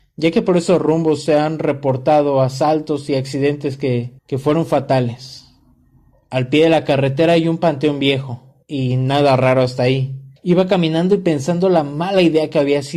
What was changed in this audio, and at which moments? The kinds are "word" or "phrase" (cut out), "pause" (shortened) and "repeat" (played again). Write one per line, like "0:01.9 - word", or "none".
0:04.2 - pause
0:06.1 - pause
0:08.6 - pause
0:10.4 - pause